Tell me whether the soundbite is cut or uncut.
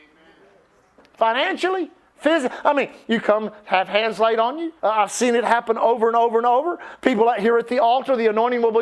cut